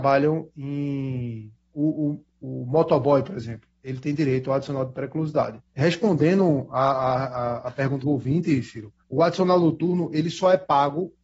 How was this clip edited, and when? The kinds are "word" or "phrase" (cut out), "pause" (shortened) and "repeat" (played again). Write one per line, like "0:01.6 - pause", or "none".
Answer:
0:05.7 - pause
0:08.0 - word
0:09.0 - pause